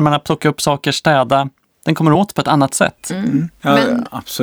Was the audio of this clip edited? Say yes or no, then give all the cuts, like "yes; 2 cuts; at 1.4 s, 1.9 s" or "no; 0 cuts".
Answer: no; 0 cuts